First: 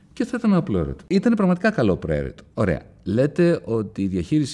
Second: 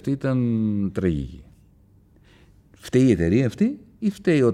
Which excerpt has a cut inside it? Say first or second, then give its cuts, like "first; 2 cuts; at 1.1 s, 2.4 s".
first; 1 cut; at 2.5 s